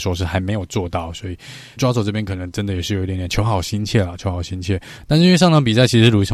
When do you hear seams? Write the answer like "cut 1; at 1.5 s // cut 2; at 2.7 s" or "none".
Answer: cut 1; at 1.8 s